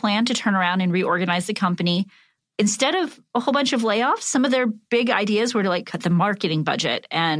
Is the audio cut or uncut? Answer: uncut